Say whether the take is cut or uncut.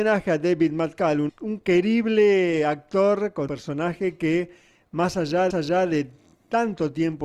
cut